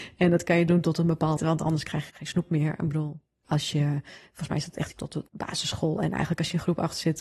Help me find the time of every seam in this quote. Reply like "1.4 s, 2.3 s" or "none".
1.4 s, 2.1 s, 4.9 s, 5.3 s